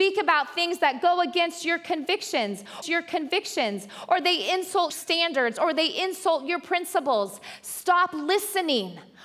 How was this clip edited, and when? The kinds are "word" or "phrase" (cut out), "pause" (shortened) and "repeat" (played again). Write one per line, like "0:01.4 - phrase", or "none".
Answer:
0:02.8 - repeat
0:04.9 - word